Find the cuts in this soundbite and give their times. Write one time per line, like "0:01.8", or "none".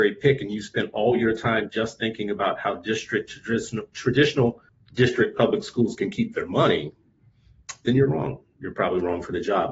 0:04.7

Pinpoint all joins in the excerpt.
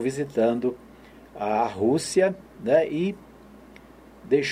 none

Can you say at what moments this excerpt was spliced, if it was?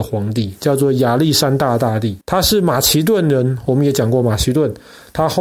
0:02.2

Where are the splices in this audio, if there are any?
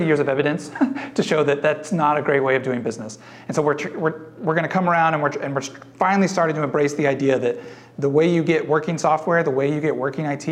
none

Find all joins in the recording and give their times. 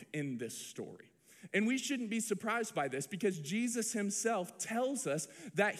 none

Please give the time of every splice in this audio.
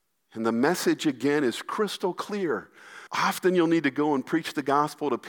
0:03.1

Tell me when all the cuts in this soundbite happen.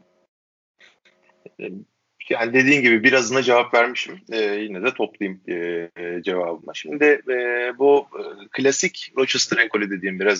0:01.5

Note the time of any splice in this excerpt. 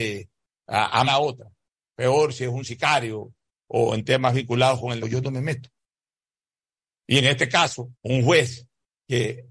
0:01.1
0:05.0
0:07.9

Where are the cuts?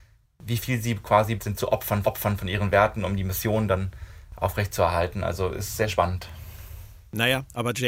0:01.4
0:02.0

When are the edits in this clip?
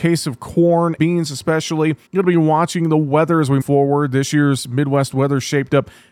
0:01.0
0:02.1
0:03.6

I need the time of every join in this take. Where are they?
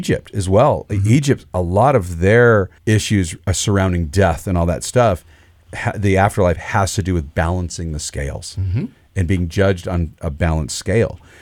0:02.8

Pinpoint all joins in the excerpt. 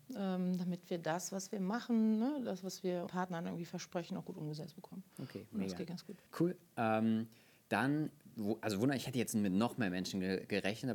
0:03.1
0:06.3

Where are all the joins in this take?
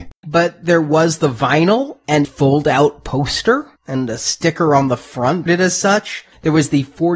0:02.2
0:05.5

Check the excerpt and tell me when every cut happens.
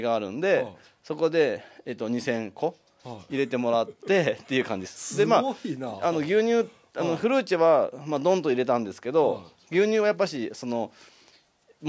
none

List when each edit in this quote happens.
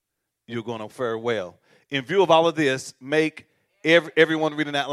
none

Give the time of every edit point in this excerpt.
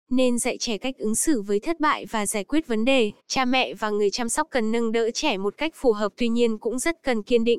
0:03.2

